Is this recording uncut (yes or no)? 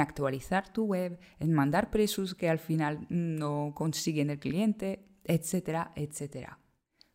yes